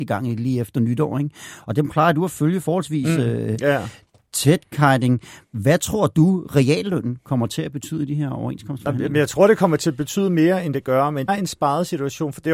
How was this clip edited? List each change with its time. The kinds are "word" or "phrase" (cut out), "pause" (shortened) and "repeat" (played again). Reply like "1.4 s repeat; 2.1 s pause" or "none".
11.3 s phrase